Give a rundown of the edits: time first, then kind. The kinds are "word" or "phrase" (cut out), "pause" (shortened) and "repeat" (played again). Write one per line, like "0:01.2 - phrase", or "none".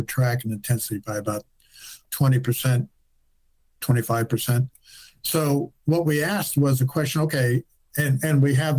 0:02.0 - word